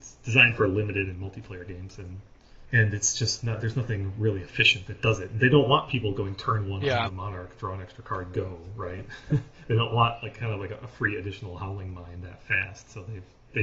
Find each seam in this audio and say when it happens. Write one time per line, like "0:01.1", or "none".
0:02.7